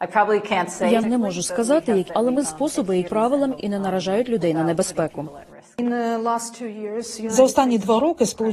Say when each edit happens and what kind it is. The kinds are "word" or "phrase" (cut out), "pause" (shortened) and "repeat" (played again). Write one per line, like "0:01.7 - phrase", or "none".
0:01.0 - word
0:02.1 - word
0:02.4 - word
0:03.1 - word
0:03.6 - word